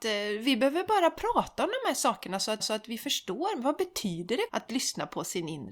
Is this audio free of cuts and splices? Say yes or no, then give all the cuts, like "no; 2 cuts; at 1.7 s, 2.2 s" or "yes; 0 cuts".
no; 2 cuts; at 2.6 s, 4.5 s